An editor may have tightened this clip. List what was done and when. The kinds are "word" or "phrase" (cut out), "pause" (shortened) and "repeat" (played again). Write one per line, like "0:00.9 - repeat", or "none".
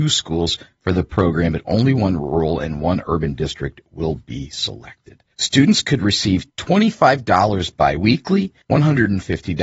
0:05.3 - pause
0:06.5 - pause
0:08.6 - pause